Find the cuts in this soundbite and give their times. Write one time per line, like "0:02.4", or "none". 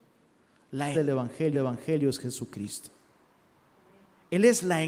0:00.9
0:01.5